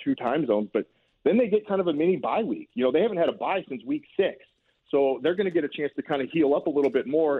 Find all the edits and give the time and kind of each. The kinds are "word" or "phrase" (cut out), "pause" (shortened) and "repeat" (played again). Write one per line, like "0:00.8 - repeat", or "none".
none